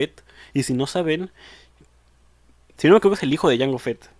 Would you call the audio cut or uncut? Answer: uncut